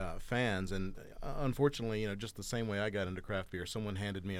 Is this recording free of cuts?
yes; 0 cuts

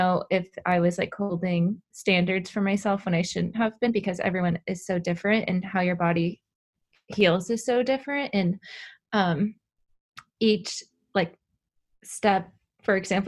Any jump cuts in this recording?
no; 0 cuts

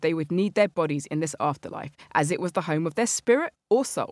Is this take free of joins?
yes; 0 cuts

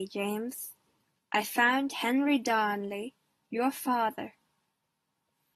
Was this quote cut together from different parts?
no; 0 cuts

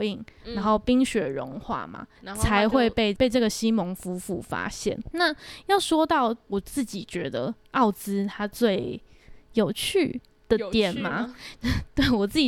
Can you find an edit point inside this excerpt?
yes; 1 cut; at 2.1 s

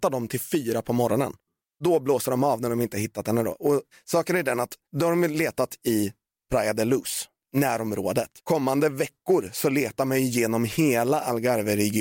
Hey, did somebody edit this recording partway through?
yes; 1 cut; at 8.4 s

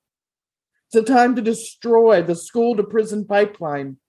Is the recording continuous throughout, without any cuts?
yes; 0 cuts

